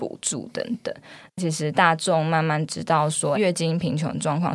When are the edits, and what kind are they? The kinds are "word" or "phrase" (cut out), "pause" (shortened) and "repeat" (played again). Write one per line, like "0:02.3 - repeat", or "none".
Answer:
0:03.3 - phrase